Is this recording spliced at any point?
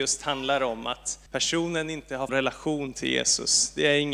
yes; 2 cuts; at 1.3 s, 2.3 s

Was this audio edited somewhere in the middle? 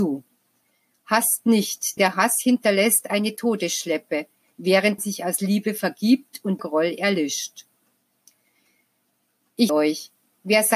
yes; 4 cuts; at 2.0 s, 5.0 s, 6.6 s, 9.7 s

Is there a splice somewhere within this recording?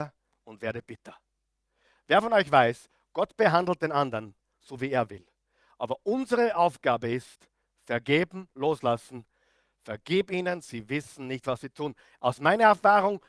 no; 0 cuts

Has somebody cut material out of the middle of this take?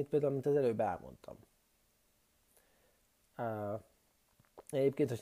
no; 0 cuts

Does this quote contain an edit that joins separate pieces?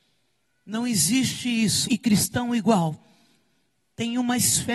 yes; 1 cut; at 1.8 s

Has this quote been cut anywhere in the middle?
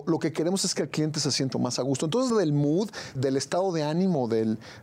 yes; 3 cuts; at 1.5 s, 2.3 s, 3.1 s

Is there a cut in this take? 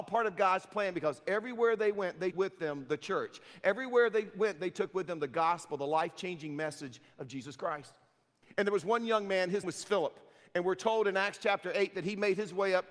yes; 2 cuts; at 2.3 s, 9.6 s

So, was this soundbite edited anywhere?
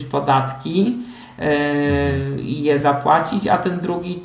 no; 0 cuts

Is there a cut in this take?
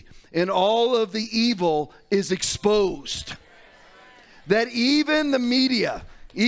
no; 0 cuts

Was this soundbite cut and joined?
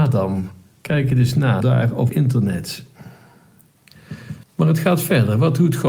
yes; 3 cuts; at 1.6 s, 2.1 s, 4.4 s

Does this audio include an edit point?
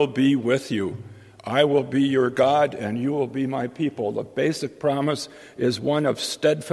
no; 0 cuts

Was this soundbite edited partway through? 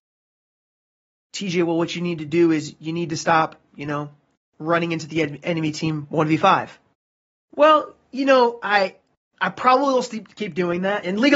no; 0 cuts

